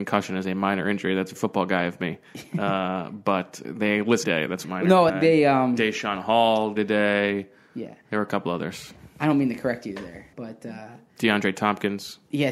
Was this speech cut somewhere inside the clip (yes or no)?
yes